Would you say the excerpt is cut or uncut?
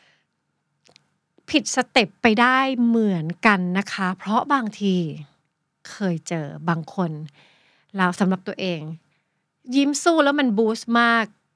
uncut